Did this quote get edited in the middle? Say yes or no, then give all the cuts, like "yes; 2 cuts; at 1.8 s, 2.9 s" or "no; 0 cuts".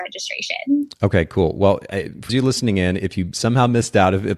yes; 1 cut; at 2.3 s